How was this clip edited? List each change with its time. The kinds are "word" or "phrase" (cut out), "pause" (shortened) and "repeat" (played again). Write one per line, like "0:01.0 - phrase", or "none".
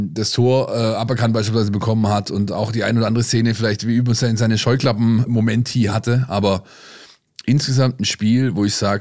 0:05.3 - word